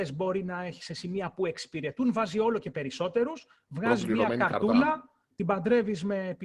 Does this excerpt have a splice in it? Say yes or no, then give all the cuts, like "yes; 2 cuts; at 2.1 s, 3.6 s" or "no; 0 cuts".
no; 0 cuts